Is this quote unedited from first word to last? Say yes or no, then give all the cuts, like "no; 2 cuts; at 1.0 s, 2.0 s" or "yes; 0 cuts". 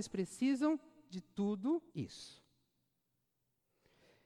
no; 1 cut; at 1.9 s